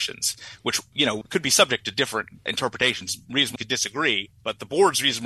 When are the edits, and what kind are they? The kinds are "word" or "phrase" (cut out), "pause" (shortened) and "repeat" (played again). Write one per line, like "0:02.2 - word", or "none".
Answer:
0:03.6 - word